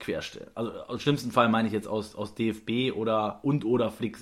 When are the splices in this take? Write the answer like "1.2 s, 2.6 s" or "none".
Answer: none

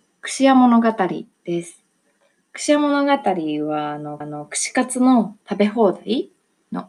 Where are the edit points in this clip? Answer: 4.2 s, 5.4 s

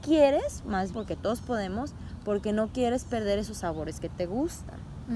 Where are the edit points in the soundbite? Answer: 0.9 s

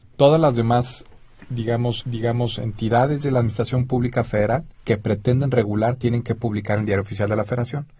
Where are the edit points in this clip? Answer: 2.0 s, 4.7 s

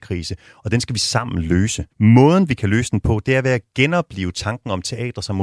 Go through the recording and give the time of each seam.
1.9 s

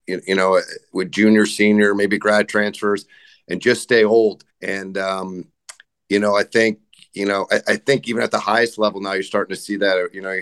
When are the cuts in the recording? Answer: 4.5 s

